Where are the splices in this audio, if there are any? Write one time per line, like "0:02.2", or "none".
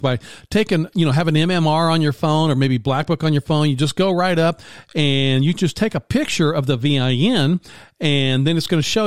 none